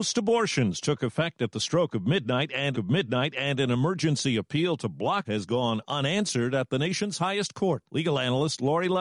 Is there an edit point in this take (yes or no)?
yes